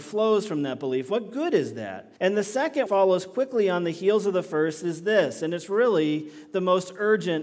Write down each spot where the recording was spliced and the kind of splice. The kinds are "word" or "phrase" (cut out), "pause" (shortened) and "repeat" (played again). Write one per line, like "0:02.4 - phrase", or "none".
0:02.2 - pause
0:02.9 - word